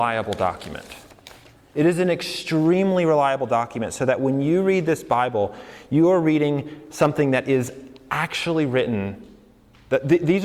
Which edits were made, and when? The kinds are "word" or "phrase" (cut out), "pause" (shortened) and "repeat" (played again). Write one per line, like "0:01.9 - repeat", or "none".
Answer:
none